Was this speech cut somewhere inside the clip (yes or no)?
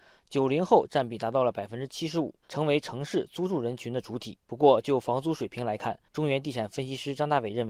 yes